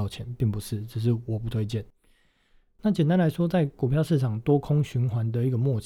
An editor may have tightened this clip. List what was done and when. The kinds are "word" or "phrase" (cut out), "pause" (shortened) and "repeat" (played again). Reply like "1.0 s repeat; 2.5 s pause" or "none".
none